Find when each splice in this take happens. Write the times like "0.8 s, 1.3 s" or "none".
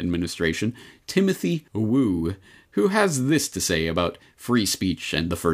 1.7 s